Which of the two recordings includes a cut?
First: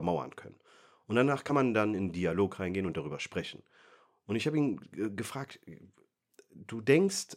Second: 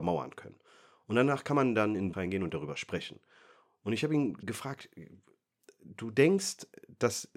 second; 2 cuts; at 2.1 s, 4.4 s

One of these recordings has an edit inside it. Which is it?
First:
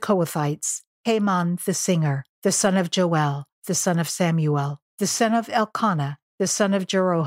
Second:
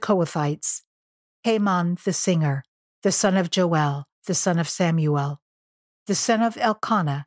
first; 4 cuts; at 0.9 s, 2.3 s, 4.9 s, 6.3 s

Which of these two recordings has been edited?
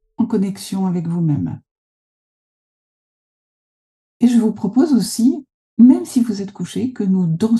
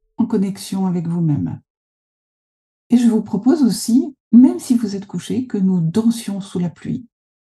second; 2 cuts; at 1.9 s, 4.2 s

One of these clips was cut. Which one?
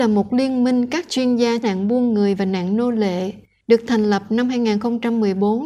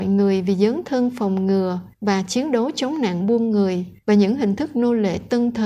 first; 1 cut; at 1.6 s

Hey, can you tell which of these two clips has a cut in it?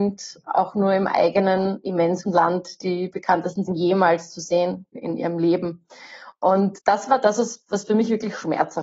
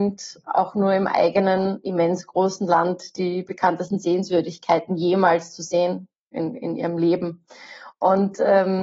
first; 4 cuts; at 2.3 s, 3.7 s, 4.9 s, 6.8 s

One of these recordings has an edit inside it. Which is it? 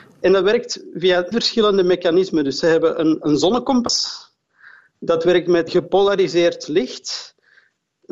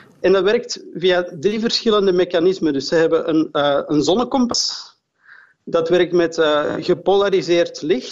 first; 3 cuts; at 1.3 s, 3.2 s, 5.7 s

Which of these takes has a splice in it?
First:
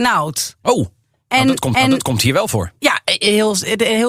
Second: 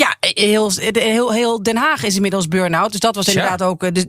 first; 1 cut; at 1.7 s

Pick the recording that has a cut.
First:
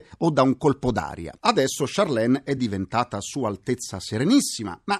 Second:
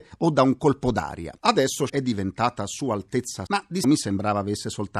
second; 3 cuts; at 1.9 s, 3.5 s, 3.8 s

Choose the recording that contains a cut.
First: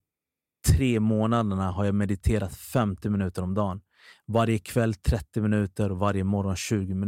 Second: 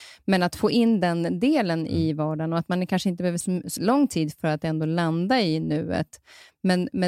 second; 2 cuts; at 3.4 s, 3.8 s

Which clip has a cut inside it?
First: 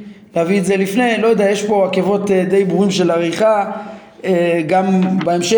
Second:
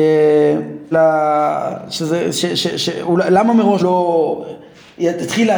second; 2 cuts; at 0.9 s, 3.8 s

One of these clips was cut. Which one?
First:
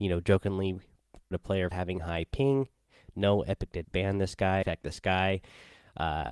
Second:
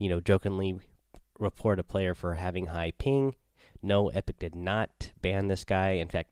first; 4 cuts; at 1.3 s, 1.7 s, 3.8 s, 4.6 s

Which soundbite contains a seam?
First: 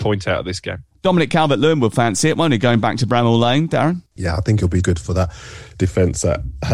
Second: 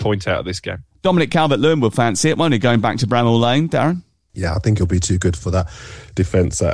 first; 2 cuts; at 4.1 s, 4.8 s

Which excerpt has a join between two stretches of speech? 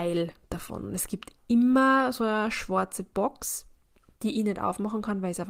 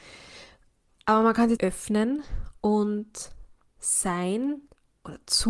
second; 2 cuts; at 1.6 s, 3.8 s

